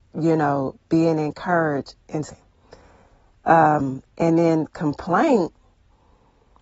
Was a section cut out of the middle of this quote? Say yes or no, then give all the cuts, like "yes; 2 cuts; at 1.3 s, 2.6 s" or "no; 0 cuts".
yes; 1 cut; at 2.3 s